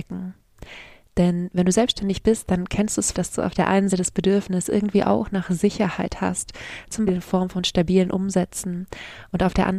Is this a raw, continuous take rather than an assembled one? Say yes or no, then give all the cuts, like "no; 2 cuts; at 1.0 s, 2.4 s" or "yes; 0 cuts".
no; 3 cuts; at 3.1 s, 3.9 s, 7.1 s